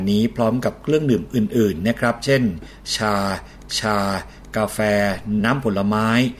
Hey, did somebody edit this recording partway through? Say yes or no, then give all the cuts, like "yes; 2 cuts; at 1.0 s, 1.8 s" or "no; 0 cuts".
yes; 2 cuts; at 3.7 s, 5.4 s